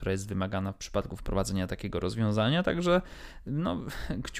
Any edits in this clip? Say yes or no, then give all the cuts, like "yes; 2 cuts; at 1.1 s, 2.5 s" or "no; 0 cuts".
no; 0 cuts